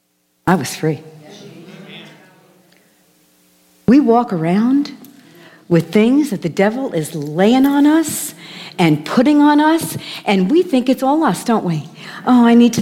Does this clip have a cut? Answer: no; 0 cuts

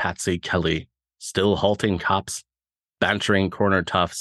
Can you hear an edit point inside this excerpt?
no; 0 cuts

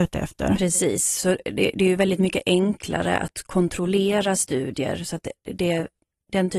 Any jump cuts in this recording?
no; 0 cuts

